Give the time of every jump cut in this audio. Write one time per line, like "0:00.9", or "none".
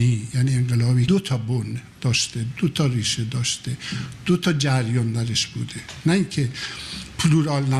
0:01.1